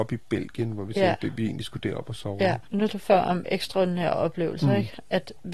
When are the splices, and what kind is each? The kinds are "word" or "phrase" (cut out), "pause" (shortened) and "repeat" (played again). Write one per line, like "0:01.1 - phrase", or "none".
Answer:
0:02.9 - word